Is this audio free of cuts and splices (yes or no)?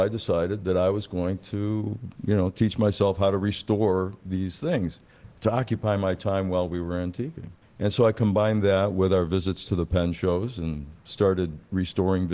no